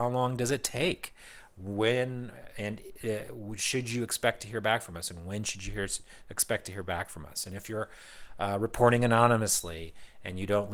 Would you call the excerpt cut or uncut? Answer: uncut